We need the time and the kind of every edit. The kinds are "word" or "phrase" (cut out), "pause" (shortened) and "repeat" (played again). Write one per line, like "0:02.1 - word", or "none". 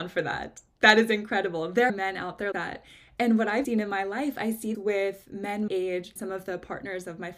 0:01.9 - word
0:02.5 - word
0:03.6 - word
0:04.7 - word
0:05.7 - word
0:06.2 - word